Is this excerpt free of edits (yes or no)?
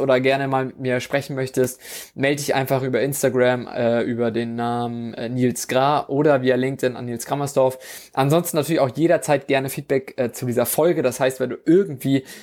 yes